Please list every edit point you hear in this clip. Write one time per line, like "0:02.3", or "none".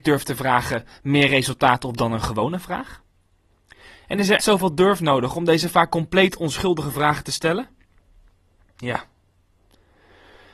0:04.4